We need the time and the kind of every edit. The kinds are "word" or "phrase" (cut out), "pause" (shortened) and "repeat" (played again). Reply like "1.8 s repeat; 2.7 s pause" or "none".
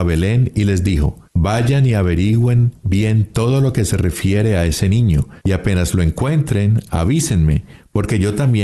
1.2 s pause; 5.4 s pause